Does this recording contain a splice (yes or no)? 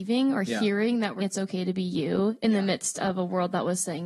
yes